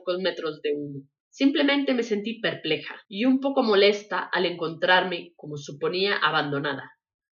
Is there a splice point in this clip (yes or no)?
yes